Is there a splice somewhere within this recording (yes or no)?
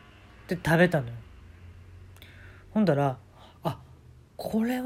no